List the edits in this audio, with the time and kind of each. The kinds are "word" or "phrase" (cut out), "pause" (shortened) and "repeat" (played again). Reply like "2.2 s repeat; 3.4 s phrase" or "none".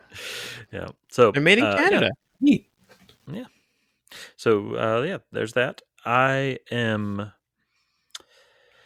none